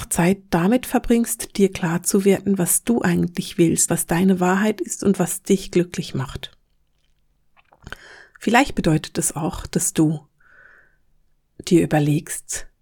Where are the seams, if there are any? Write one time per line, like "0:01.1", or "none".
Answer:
0:03.9